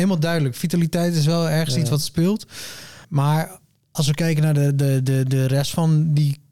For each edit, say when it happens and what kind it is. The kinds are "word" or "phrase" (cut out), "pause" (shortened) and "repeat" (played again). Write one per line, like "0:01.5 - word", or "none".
0:03.0 - pause